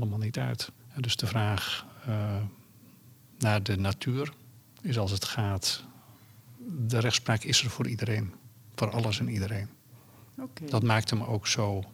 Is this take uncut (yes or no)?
yes